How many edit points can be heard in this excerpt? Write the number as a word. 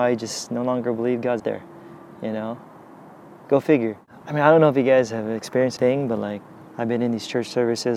three